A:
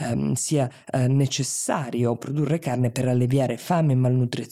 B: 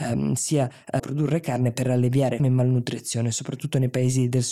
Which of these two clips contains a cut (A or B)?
B